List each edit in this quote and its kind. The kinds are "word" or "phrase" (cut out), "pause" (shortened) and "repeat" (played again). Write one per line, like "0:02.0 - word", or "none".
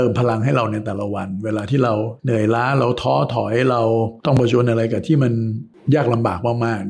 0:02.2 - pause
0:04.2 - pause

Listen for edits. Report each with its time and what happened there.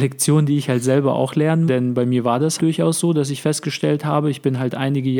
0:01.7 - word
0:02.6 - word

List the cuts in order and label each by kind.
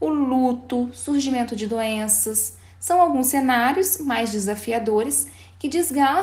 none

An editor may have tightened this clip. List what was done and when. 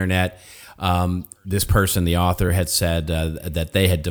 none

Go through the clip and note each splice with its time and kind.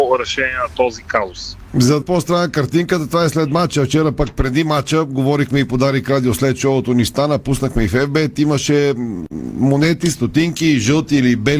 0:02.0 - phrase

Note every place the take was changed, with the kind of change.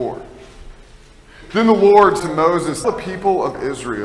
0:02.2 - word
0:02.8 - word

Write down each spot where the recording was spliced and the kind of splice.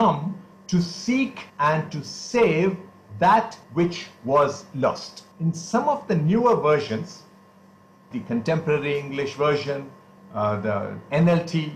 0:01.5 - pause
0:03.6 - pause
0:05.3 - pause
0:08.1 - word

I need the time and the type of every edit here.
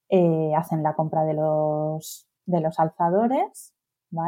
0:02.3 - pause

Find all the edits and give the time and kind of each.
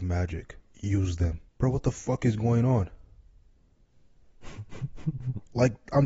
0:01.5 - pause

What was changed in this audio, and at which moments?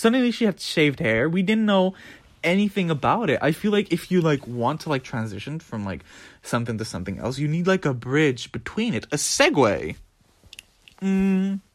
none

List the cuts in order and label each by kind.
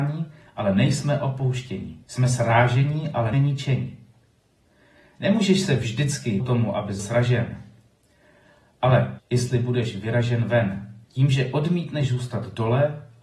0:02.0 - pause
0:03.3 - word
0:06.4 - word
0:07.0 - word
0:09.2 - word
0:11.0 - pause

